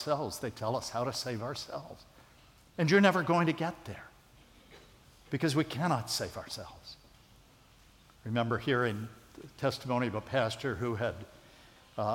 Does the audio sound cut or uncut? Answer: uncut